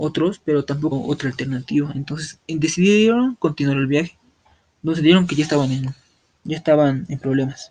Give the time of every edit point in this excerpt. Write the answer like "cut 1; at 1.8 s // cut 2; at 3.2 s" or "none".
cut 1; at 0.9 s // cut 2; at 2.4 s // cut 3; at 4.5 s // cut 4; at 5.3 s